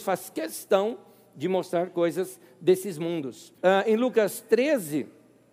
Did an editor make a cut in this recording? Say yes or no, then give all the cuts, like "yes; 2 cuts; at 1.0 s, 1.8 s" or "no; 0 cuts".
yes; 1 cut; at 3.6 s